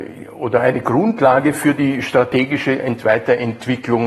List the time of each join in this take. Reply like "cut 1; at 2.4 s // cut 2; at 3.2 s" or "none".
none